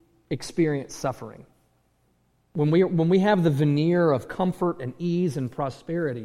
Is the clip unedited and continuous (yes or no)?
yes